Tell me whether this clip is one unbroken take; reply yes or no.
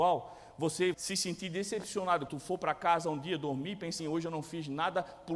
no